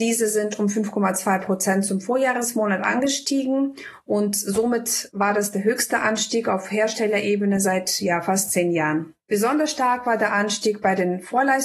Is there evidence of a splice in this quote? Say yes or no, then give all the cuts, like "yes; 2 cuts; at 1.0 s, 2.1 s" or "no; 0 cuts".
no; 0 cuts